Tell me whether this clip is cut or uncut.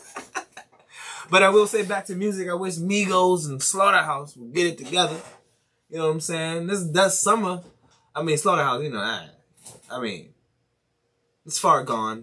uncut